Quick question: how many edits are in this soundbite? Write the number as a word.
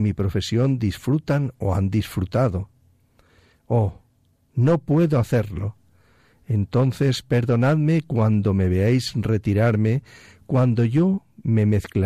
zero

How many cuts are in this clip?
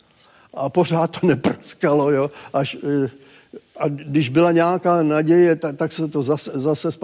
zero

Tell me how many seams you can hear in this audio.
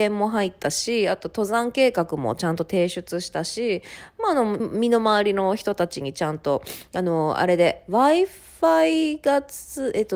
one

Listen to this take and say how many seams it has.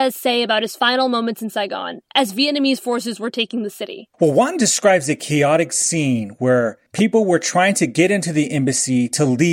two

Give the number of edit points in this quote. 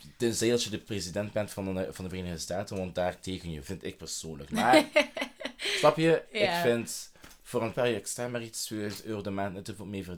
two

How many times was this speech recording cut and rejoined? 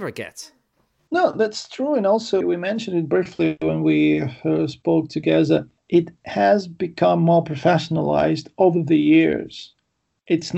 two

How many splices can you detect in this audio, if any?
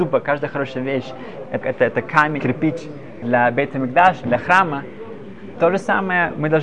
five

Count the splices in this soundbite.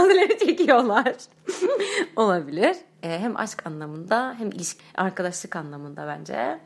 one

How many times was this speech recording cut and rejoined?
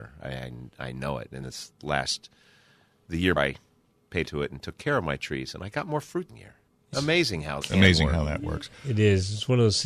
six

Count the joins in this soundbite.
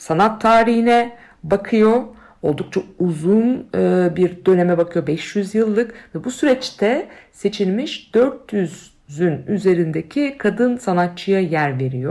zero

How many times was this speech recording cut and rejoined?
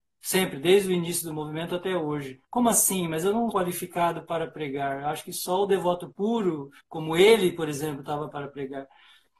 four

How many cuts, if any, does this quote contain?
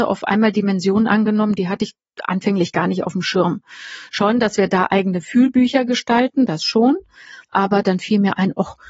one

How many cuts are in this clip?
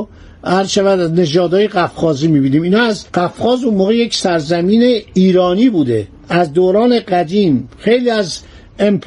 one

